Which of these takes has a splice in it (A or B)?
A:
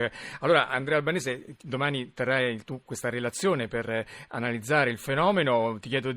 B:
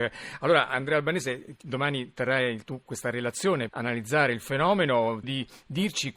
B